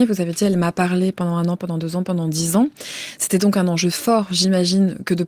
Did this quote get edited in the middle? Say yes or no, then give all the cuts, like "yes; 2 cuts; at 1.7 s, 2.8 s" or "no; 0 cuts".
no; 0 cuts